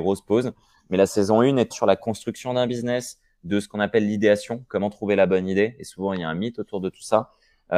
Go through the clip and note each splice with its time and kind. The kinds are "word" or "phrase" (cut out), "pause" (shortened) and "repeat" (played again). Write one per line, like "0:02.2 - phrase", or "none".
0:01.7 - word